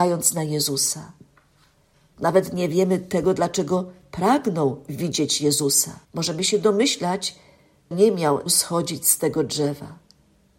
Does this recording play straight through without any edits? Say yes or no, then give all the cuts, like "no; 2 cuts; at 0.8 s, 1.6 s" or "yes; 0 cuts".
no; 3 cuts; at 6.0 s, 7.9 s, 8.5 s